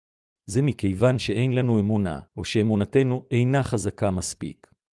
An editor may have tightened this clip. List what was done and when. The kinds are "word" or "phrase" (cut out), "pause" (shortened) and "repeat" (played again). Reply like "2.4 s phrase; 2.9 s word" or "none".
2.3 s pause